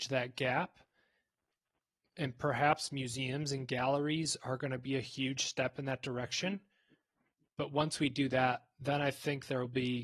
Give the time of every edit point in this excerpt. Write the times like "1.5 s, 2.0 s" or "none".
none